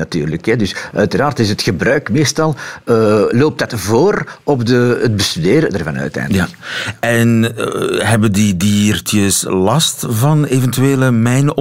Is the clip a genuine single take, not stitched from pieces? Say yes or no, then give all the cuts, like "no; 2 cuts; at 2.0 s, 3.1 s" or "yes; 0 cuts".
yes; 0 cuts